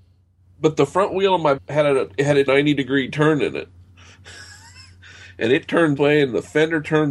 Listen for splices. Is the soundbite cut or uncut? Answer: cut